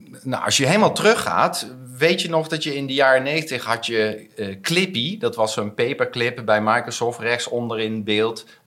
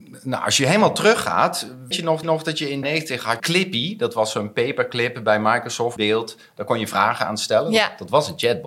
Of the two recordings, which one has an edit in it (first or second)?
second